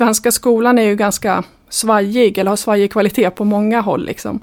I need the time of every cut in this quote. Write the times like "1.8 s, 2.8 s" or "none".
none